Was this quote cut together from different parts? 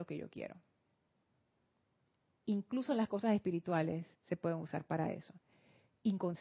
yes; 1 cut; at 4.1 s

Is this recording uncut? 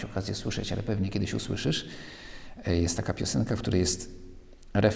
yes; 0 cuts

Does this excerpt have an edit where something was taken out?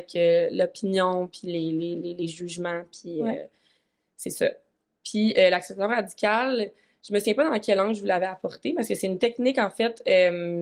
no; 0 cuts

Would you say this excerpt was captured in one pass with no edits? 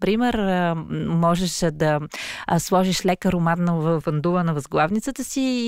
yes; 0 cuts

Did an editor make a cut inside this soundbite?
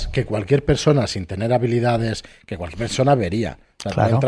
no; 0 cuts

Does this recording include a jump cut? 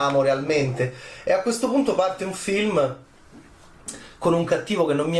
no; 0 cuts

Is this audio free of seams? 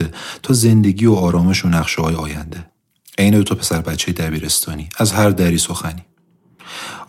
yes; 0 cuts

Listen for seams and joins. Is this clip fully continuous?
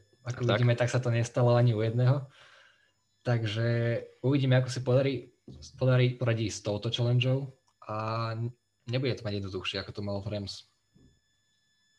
yes; 0 cuts

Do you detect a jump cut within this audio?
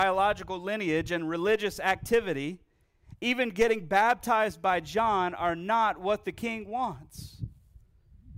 no; 0 cuts

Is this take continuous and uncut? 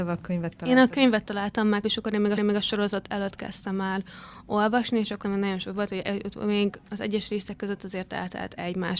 no; 3 cuts; at 1.8 s, 2.4 s, 5.2 s

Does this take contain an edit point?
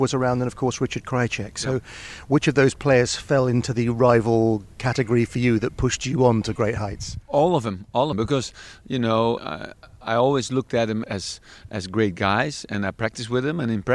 yes; 4 cuts; at 7.2 s, 8.1 s, 9.4 s, 11.0 s

